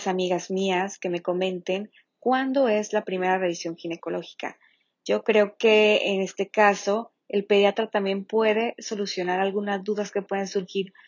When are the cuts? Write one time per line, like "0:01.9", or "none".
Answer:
none